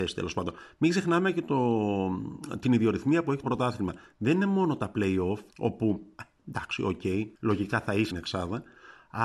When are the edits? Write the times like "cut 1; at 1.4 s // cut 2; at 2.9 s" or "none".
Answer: cut 1; at 3.4 s // cut 2; at 5.5 s // cut 3; at 7.3 s // cut 4; at 8.1 s

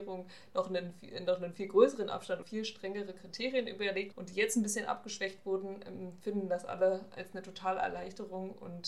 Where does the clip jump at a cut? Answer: cut 1; at 2.4 s // cut 2; at 4.1 s

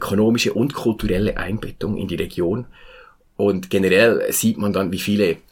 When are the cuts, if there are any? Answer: none

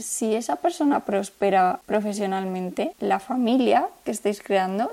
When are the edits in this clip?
none

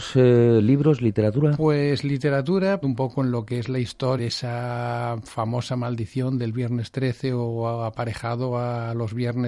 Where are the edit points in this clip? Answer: cut 1; at 2.8 s // cut 2; at 4.2 s

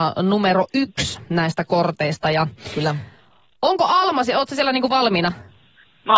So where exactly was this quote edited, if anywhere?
none

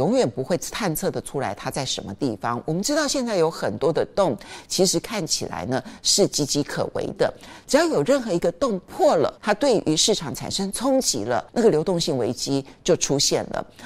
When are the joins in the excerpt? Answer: cut 1; at 9.4 s // cut 2; at 11.5 s

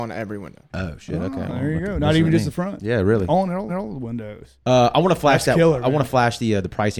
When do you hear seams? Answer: cut 1; at 3.7 s

